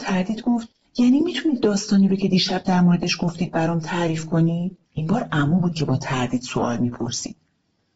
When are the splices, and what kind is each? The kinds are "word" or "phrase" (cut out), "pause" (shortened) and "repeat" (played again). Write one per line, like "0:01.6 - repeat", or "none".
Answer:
0:04.8 - pause

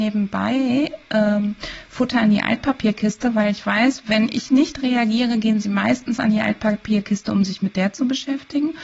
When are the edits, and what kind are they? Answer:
none

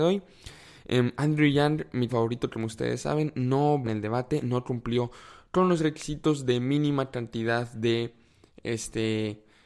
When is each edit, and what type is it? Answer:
0:02.1 - word
0:03.8 - phrase

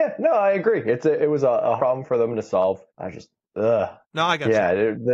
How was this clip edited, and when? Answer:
0:01.8 - word
0:02.9 - pause
0:04.0 - pause

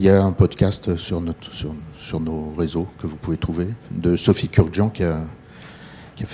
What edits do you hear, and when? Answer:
none

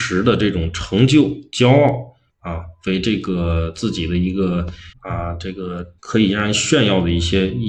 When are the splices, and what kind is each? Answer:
0:02.3 - pause
0:04.9 - pause
0:06.0 - pause

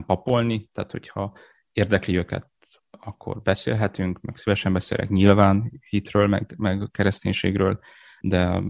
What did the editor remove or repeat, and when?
none

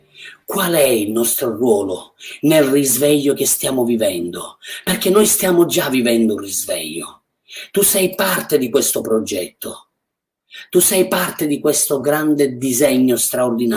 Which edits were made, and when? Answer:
none

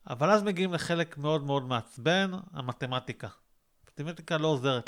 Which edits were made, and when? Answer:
none

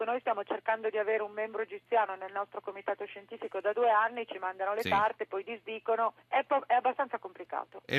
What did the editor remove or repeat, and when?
0:06.2 - pause

